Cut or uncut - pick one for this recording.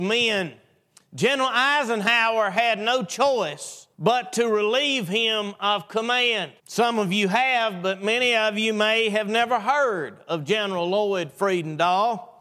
cut